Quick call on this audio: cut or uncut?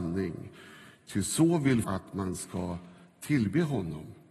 cut